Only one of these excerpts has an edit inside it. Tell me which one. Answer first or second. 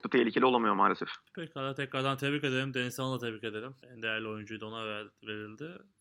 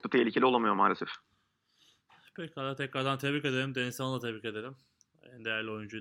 first